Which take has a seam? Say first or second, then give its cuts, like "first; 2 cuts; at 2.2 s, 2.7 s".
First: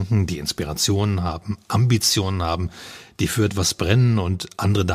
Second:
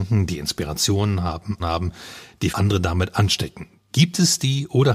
second; 2 cuts; at 1.6 s, 2.5 s